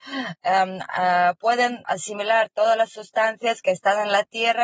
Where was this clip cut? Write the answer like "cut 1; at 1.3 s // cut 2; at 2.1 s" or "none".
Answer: cut 1; at 1.8 s